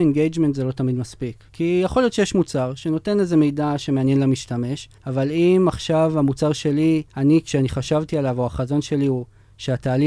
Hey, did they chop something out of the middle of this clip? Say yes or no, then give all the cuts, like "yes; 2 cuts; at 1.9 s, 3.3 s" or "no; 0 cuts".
yes; 3 cuts; at 1.5 s, 5.0 s, 7.1 s